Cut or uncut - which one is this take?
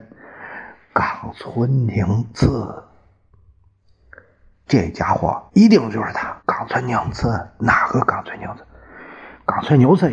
cut